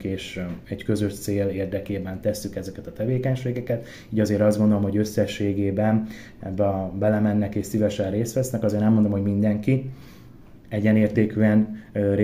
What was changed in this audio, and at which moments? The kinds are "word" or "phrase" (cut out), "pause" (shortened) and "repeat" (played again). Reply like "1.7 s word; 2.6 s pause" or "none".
none